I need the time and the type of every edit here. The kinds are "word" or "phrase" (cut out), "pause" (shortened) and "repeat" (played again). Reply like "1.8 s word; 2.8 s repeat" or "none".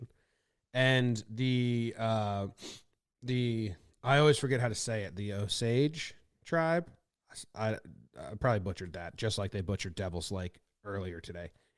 none